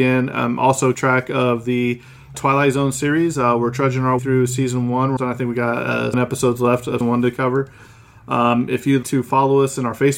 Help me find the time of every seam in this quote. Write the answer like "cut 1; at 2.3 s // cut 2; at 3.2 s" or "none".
cut 1; at 0.9 s // cut 2; at 2.3 s // cut 3; at 4.2 s // cut 4; at 5.2 s // cut 5; at 6.1 s // cut 6; at 7.0 s // cut 7; at 9.0 s